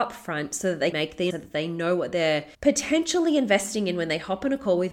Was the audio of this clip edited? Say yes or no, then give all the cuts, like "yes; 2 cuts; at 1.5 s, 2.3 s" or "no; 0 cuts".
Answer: yes; 3 cuts; at 0.9 s, 1.3 s, 2.5 s